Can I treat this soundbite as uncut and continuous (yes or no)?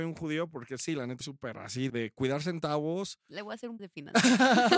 no